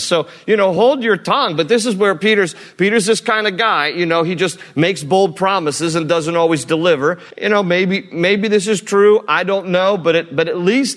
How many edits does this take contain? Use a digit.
1